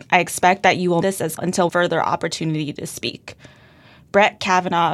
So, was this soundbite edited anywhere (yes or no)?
yes